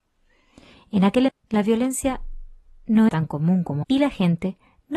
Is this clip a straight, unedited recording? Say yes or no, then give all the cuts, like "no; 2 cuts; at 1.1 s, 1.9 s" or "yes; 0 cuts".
no; 3 cuts; at 1.3 s, 3.1 s, 3.8 s